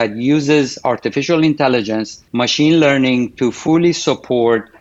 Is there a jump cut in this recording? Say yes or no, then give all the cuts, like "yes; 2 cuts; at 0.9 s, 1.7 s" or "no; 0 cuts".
yes; 1 cut; at 2.3 s